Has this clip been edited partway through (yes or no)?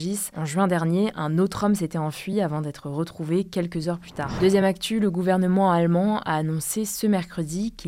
no